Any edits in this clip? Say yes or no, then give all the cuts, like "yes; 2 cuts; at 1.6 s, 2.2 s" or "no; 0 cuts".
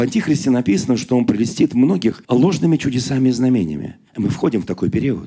yes; 2 cuts; at 2.2 s, 4.1 s